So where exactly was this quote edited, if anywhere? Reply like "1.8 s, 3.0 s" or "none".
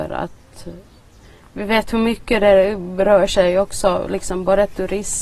none